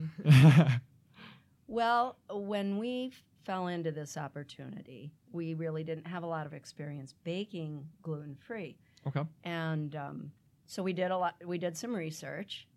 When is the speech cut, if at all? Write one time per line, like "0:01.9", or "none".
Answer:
none

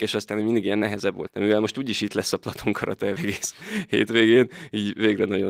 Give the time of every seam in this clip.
0:01.3
0:03.2

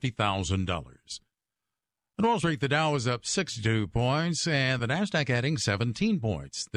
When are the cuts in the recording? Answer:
none

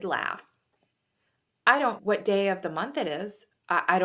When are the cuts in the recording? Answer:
0:02.0

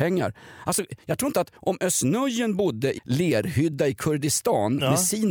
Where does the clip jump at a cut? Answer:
0:03.0

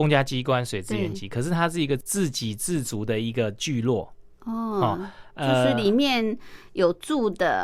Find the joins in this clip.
none

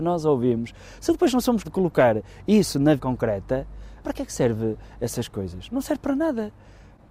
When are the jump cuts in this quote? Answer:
0:01.6
0:03.0
0:04.0

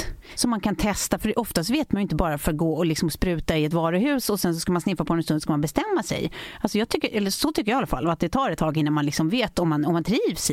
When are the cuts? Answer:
none

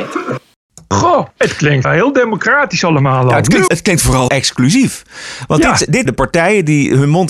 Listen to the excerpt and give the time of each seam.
0:01.3
0:01.8
0:03.7
0:04.3
0:06.1

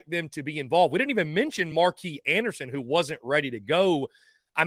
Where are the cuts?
none

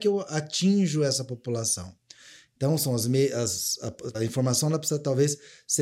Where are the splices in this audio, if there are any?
0:04.1

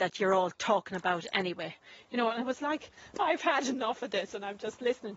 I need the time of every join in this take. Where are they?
none

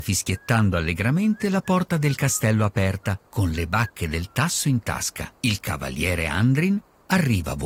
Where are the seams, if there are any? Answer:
0:03.3
0:05.4

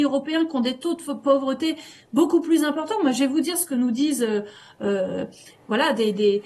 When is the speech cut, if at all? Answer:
none

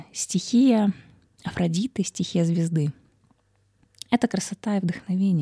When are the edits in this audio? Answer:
none

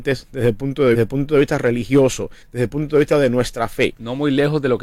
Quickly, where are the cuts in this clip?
0:00.9
0:02.4

